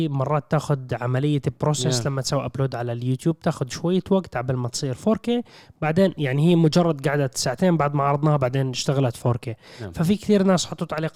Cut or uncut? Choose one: uncut